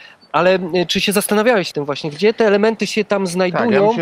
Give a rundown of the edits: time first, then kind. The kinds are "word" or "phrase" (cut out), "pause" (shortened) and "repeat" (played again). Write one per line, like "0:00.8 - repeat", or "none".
0:01.7 - word